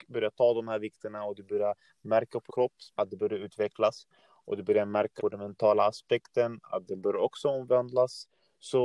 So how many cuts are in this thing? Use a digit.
3